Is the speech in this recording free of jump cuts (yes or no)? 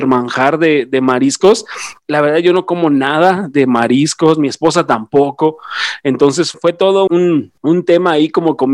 no